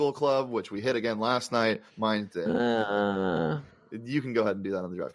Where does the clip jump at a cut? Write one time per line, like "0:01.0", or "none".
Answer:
0:01.9